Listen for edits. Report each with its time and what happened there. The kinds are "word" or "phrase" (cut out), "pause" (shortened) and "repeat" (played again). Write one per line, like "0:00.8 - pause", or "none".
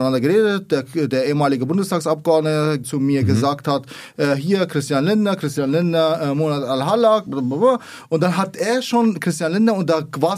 0:02.8 - phrase
0:07.3 - word